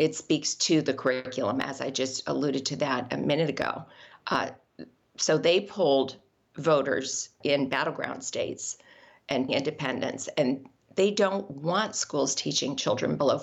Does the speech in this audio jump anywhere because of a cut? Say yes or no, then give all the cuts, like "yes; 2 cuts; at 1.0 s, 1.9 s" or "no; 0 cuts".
yes; 2 cuts; at 7.4 s, 9.5 s